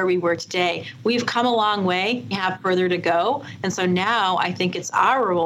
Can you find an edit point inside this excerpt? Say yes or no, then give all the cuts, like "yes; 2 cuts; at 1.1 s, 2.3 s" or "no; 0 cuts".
yes; 1 cut; at 2.3 s